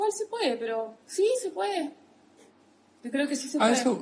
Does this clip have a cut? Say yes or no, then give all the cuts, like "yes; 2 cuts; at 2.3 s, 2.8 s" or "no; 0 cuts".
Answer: yes; 1 cut; at 1.0 s